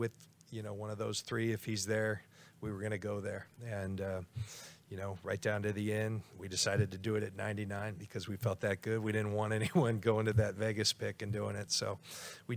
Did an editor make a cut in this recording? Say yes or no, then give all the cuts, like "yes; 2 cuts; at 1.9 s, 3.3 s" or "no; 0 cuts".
no; 0 cuts